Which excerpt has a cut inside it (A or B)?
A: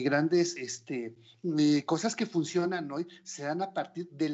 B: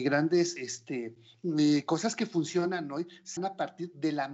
B